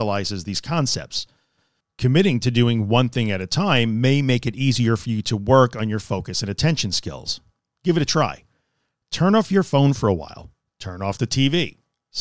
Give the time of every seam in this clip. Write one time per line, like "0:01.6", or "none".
none